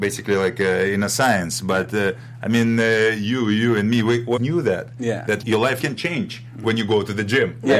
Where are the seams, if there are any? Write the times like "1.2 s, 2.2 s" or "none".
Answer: 4.4 s, 5.4 s, 5.8 s